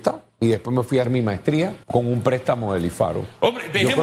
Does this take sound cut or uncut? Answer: cut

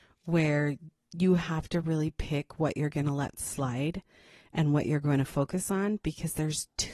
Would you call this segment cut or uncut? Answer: uncut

